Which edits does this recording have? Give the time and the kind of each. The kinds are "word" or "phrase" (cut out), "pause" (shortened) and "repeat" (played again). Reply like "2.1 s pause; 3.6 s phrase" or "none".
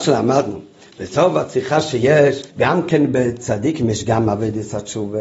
2.5 s pause